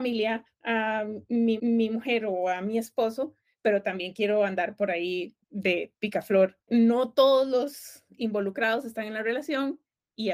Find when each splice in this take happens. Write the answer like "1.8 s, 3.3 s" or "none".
1.6 s, 5.4 s

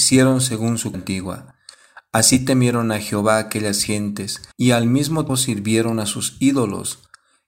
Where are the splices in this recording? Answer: 0.9 s, 4.5 s, 5.3 s

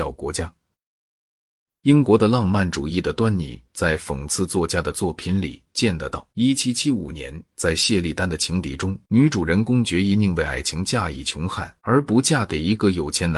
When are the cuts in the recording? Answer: 6.3 s, 9.0 s, 11.8 s

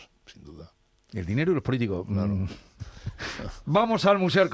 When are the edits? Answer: none

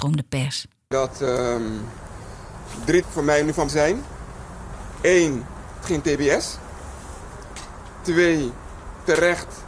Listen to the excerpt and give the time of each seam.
0.9 s, 3.0 s, 3.7 s, 5.8 s

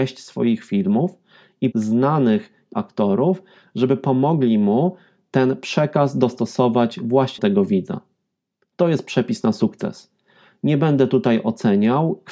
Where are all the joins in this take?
1.7 s, 2.7 s, 7.4 s

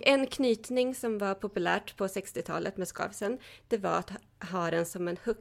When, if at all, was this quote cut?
none

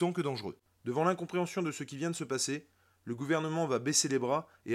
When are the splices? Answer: none

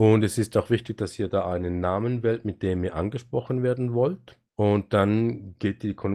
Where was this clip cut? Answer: 4.5 s

